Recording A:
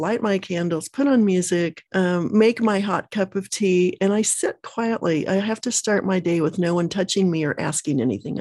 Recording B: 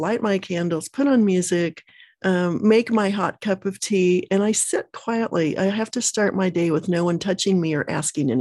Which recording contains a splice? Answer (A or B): A